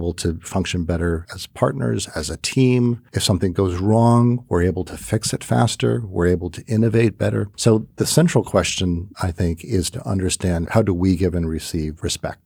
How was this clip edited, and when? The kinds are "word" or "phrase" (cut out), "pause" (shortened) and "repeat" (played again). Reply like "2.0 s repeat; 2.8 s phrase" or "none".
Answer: 7.5 s pause